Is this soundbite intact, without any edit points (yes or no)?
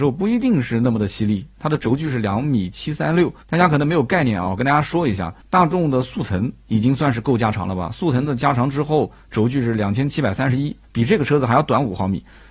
no